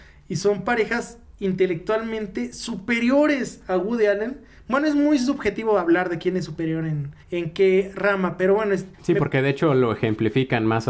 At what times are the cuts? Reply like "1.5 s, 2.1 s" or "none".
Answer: 7.2 s, 8.9 s